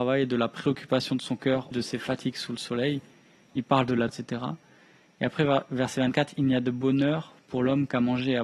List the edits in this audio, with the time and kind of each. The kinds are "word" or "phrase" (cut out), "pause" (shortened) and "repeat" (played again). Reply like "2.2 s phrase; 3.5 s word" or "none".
1.7 s word; 4.1 s word